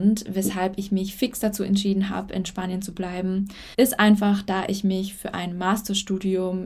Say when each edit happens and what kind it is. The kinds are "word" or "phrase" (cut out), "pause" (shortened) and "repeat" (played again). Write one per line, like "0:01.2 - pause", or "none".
0:03.7 - pause